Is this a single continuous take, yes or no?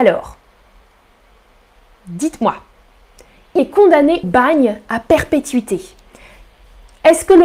no